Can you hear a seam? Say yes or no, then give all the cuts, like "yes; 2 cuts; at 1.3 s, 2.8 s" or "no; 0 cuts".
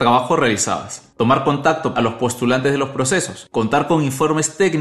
yes; 1 cut; at 1.9 s